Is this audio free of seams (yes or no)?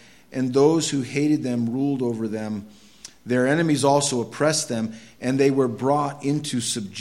yes